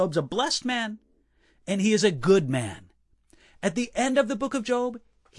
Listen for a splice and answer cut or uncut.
uncut